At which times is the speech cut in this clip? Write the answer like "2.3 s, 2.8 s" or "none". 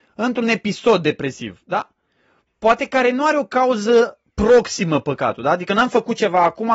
none